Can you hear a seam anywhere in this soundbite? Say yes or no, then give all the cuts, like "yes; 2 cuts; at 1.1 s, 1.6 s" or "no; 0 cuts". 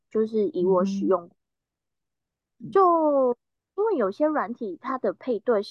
no; 0 cuts